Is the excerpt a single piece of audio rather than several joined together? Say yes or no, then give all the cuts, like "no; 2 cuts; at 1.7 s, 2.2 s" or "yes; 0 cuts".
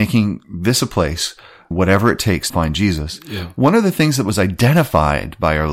no; 2 cuts; at 1.7 s, 2.5 s